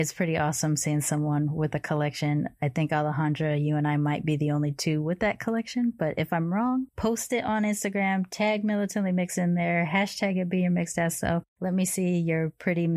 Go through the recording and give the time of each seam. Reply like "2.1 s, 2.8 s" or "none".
11.5 s